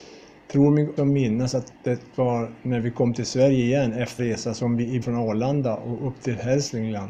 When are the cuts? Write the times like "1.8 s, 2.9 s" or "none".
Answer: 1.0 s, 1.8 s, 4.2 s, 5.0 s